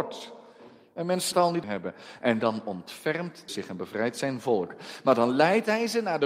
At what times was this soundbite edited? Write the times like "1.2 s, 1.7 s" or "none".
1.3 s, 1.6 s, 3.5 s